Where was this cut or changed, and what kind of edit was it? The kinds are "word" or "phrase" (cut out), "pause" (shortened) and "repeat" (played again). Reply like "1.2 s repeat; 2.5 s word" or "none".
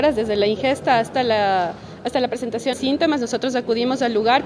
2.7 s word